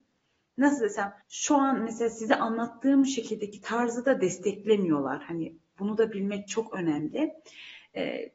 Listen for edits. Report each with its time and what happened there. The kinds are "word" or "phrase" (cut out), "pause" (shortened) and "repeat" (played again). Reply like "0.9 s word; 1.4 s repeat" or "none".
1.2 s pause